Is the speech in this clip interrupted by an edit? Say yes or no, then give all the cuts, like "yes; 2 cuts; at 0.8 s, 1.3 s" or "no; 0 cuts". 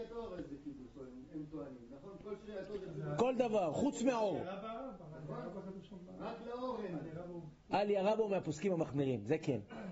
no; 0 cuts